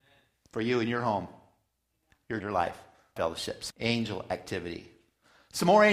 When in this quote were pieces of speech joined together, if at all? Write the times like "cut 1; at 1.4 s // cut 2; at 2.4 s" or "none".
cut 1; at 2.4 s // cut 2; at 3.2 s // cut 3; at 3.7 s